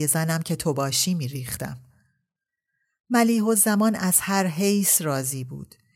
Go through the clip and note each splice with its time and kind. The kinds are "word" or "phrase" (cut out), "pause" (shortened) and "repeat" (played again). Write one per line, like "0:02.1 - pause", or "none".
none